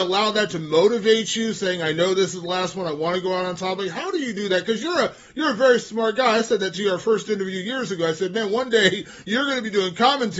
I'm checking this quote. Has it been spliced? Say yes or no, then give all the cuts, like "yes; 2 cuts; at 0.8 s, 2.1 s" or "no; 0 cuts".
no; 0 cuts